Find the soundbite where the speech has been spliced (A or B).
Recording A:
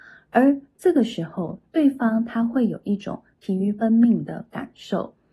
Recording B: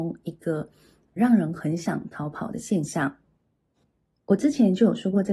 B